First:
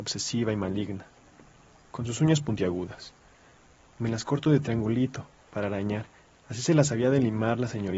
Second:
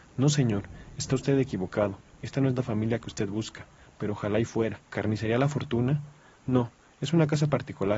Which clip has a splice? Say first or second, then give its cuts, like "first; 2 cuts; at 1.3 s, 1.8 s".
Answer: second; 1 cut; at 4.9 s